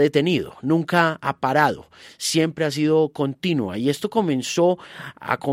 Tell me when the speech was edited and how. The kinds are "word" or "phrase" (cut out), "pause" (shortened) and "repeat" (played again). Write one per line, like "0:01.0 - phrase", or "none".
none